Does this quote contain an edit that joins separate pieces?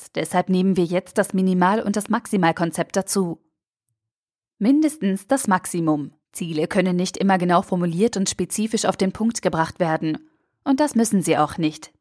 yes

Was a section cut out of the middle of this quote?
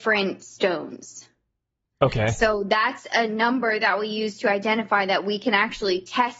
no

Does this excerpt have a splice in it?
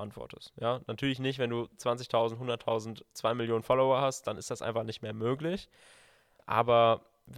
no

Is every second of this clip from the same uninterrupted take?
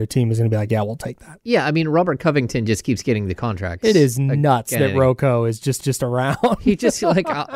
no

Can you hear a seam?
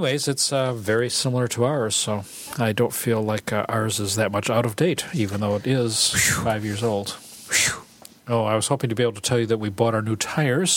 no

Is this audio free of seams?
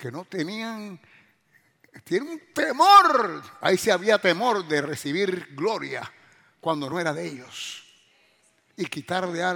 yes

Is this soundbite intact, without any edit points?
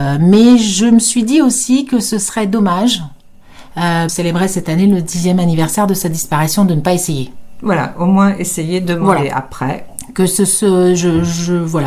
no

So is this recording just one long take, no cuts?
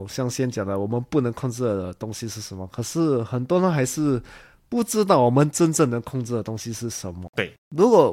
yes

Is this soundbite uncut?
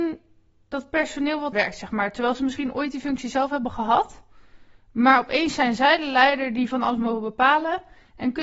no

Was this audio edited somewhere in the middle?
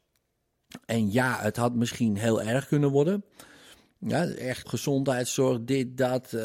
yes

